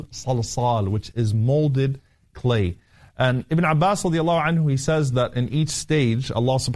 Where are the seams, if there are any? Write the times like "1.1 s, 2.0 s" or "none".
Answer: none